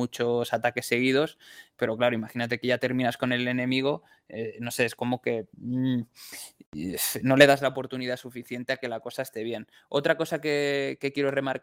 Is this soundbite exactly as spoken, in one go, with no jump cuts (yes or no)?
no